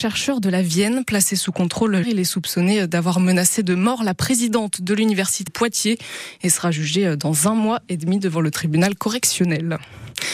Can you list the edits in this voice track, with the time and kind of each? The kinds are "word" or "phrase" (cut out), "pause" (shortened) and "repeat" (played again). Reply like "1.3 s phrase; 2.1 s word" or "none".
2.0 s word; 5.5 s word